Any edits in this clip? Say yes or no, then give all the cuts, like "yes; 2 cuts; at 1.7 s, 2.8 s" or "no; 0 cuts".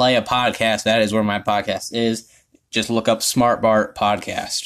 no; 0 cuts